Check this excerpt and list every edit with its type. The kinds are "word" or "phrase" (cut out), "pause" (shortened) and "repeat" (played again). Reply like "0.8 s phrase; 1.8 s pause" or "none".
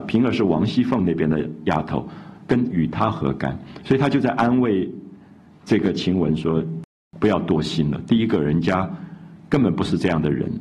none